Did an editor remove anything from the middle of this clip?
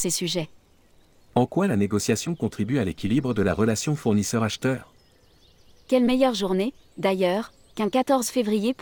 no; 0 cuts

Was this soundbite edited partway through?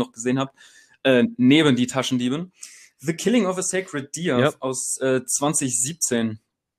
no; 0 cuts

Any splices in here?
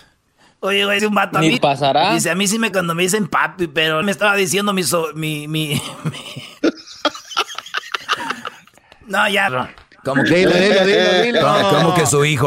yes; 5 cuts; at 1.0 s, 1.6 s, 2.7 s, 4.0 s, 9.5 s

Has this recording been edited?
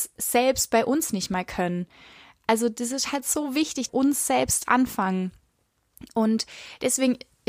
yes; 1 cut; at 3.9 s

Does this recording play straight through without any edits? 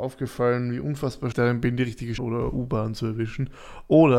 no; 2 cuts; at 1.3 s, 2.2 s

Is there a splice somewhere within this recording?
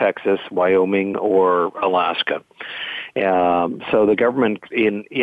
no; 0 cuts

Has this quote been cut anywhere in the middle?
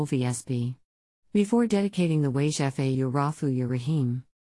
yes; 1 cut; at 2.9 s

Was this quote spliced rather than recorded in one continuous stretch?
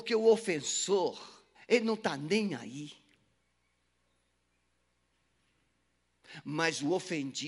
yes; 1 cut; at 1.5 s

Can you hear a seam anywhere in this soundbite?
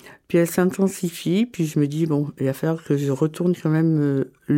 no; 0 cuts

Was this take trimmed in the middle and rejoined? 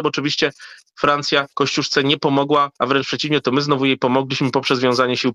yes; 2 cuts; at 1.5 s, 2.8 s

